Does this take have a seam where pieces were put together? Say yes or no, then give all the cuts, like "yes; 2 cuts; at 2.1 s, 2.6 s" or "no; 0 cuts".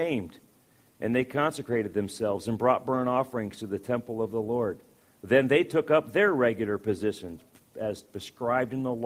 no; 0 cuts